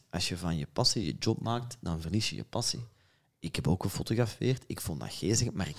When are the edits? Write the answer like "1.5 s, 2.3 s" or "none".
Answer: none